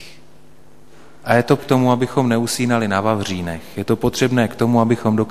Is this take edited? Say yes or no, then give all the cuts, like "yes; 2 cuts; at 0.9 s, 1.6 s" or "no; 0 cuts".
yes; 1 cut; at 1.6 s